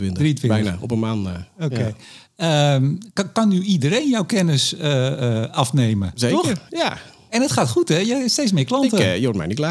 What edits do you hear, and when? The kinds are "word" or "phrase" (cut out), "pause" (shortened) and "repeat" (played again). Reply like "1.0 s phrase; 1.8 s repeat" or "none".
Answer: none

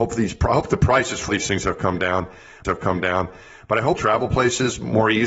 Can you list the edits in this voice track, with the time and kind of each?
1.3 s word; 2.6 s repeat; 4.0 s phrase

